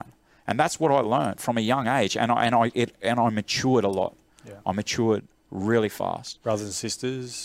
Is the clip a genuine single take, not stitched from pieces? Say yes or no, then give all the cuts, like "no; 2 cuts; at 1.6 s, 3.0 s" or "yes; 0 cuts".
yes; 0 cuts